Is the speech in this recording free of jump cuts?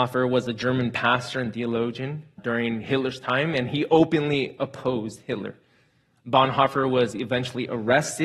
no; 1 cut; at 2.4 s

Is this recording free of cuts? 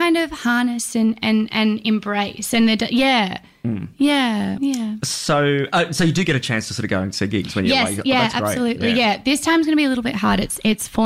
yes; 0 cuts

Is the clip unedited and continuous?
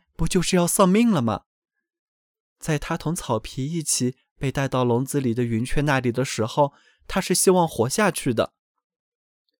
yes; 0 cuts

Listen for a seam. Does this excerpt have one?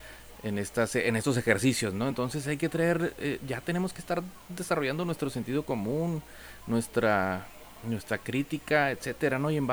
no; 0 cuts

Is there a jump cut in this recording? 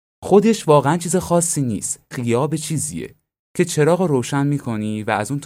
yes; 1 cut; at 2.1 s

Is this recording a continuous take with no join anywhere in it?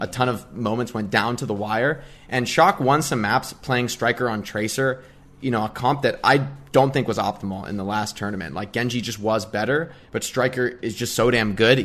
yes; 0 cuts

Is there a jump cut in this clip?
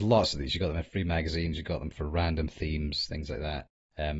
no; 0 cuts

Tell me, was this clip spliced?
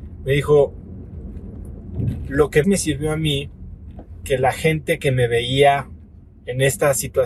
yes; 2 cuts; at 2.6 s, 4.2 s

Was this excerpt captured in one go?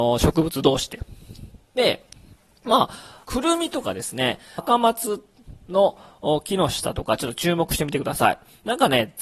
no; 4 cuts; at 2.4 s, 3.2 s, 4.6 s, 5.6 s

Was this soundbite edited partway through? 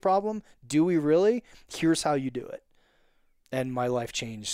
no; 0 cuts

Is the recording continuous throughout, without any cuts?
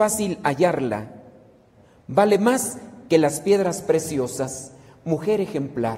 yes; 0 cuts

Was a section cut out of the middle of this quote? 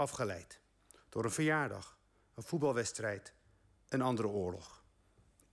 no; 0 cuts

